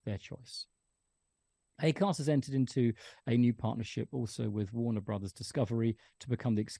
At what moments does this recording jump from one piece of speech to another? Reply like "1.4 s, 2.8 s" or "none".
none